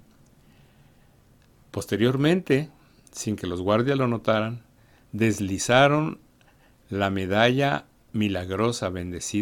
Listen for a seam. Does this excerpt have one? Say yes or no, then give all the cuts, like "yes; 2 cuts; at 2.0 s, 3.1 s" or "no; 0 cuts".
no; 0 cuts